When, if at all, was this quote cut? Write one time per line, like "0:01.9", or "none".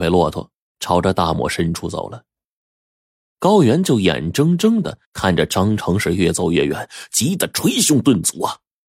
0:05.0